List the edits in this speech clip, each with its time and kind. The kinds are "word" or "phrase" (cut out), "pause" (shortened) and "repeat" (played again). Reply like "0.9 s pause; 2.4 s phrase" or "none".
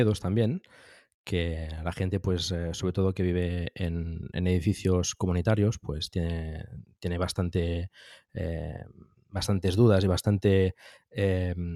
none